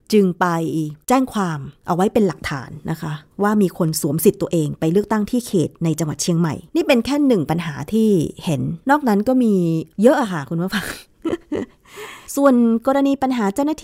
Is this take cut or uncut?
cut